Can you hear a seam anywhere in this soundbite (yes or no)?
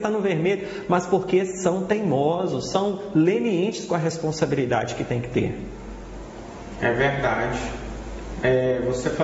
no